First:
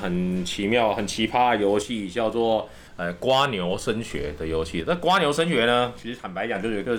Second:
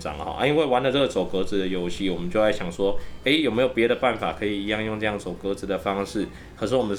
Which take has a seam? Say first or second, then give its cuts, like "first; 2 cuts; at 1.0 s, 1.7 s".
first; 1 cut; at 2.9 s